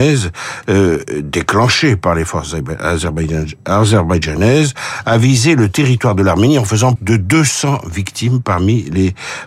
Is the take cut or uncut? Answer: cut